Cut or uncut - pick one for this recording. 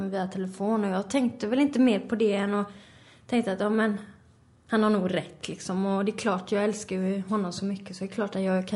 uncut